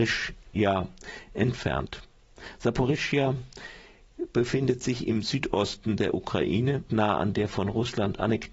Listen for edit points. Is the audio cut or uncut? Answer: cut